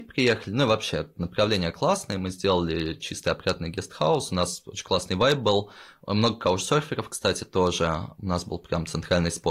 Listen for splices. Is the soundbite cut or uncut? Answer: uncut